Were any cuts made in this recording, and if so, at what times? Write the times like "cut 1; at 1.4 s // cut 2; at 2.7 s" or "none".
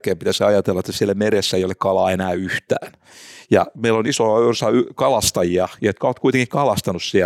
none